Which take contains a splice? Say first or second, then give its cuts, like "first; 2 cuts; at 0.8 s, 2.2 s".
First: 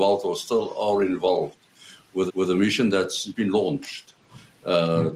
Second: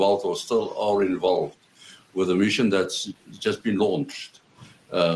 first; 2 cuts; at 2.3 s, 3.3 s